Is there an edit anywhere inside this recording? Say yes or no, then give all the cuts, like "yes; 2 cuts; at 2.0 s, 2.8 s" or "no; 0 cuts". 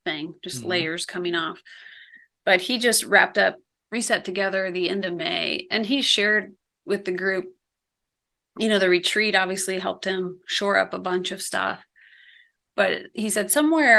no; 0 cuts